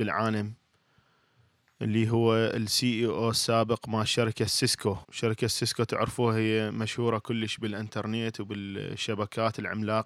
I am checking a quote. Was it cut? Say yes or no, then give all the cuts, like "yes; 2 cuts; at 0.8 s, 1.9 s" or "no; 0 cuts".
yes; 1 cut; at 5.0 s